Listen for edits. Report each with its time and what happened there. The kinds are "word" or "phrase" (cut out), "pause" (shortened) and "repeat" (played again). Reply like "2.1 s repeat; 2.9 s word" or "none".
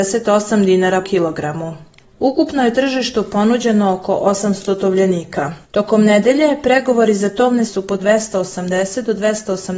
1.0 s word; 5.6 s pause; 7.7 s phrase; 8.0 s phrase